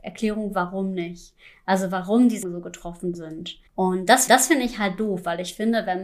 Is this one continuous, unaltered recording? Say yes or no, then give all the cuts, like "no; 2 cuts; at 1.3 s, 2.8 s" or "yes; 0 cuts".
no; 4 cuts; at 2.4 s, 3.1 s, 3.7 s, 4.3 s